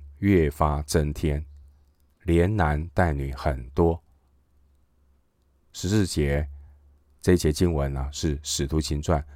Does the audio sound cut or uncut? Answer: uncut